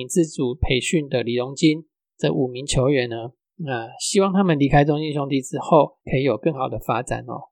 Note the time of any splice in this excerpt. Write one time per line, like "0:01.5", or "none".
0:06.0